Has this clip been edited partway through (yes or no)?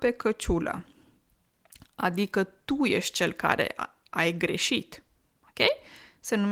no